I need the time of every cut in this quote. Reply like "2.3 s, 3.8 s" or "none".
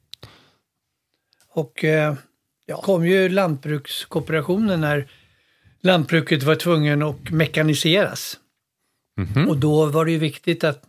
2.8 s